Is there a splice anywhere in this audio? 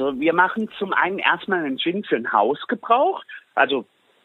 no; 0 cuts

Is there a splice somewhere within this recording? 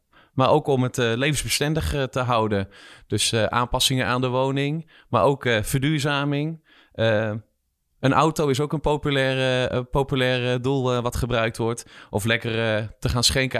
no; 0 cuts

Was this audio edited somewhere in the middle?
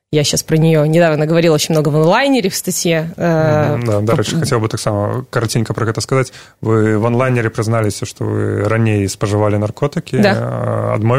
no; 0 cuts

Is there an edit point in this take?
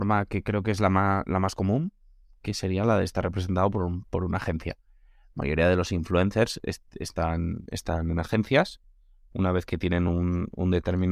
no; 0 cuts

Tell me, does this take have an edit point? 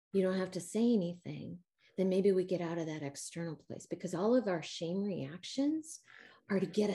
no; 0 cuts

